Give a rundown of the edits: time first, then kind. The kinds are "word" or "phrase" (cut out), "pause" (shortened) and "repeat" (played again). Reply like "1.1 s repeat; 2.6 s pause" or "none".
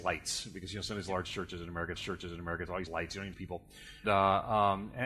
2.0 s repeat; 2.9 s phrase; 3.3 s word; 4.0 s word